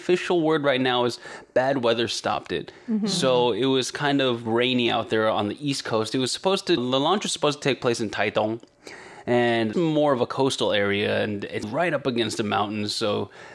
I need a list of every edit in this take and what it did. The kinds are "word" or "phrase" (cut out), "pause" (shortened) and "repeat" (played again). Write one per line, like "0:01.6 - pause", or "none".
0:06.8 - word
0:09.7 - word
0:11.6 - word

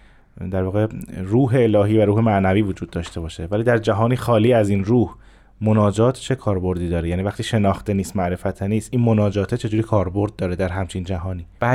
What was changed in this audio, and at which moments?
none

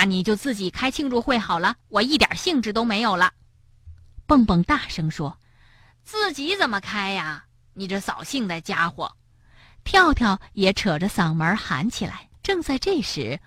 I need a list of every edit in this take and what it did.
0:01.8 - pause
0:05.4 - pause
0:09.3 - pause
0:12.4 - pause

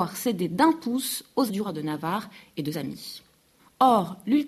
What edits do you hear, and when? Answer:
0:01.5 - word
0:02.7 - word

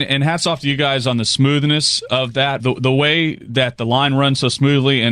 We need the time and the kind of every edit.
0:02.6 - word

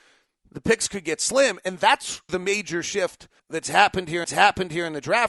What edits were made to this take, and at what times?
0:02.3 - word
0:03.4 - pause
0:04.2 - repeat

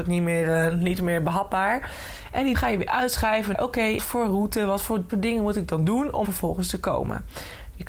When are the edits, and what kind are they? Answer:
0:02.5 - word
0:03.5 - word
0:04.0 - word
0:05.1 - word
0:06.2 - word

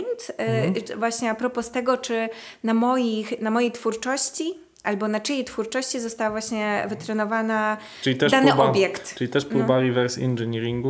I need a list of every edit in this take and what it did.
none

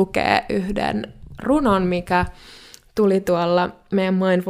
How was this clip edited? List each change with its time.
none

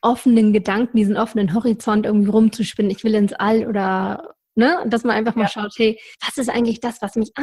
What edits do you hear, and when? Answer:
0:06.1 - pause

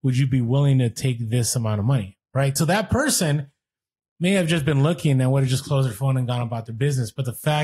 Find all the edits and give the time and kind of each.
none

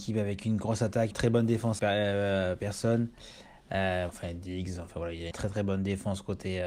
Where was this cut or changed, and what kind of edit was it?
0:01.1 - word
0:01.8 - word
0:04.1 - word
0:05.3 - word

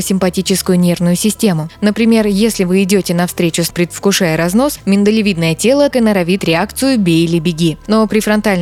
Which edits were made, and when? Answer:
0:03.7 - word
0:05.9 - word
0:06.4 - word

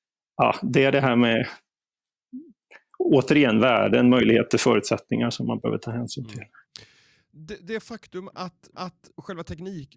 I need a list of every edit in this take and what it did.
0:08.7 - repeat

